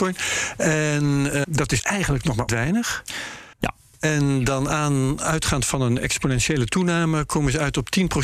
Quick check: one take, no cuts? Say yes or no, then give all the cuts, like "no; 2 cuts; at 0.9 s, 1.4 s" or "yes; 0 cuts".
no; 5 cuts; at 1.4 s, 1.8 s, 2.5 s, 3.5 s, 6.0 s